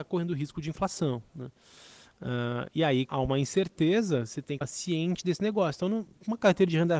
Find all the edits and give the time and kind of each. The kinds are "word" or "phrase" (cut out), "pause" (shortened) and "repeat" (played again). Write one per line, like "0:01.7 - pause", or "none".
0:03.1 - word
0:04.6 - word